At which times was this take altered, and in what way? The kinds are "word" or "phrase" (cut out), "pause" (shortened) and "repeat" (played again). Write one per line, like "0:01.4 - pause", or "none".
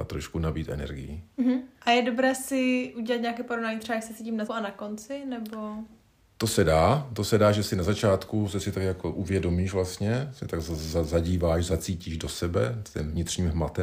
0:01.7 - pause
0:04.5 - word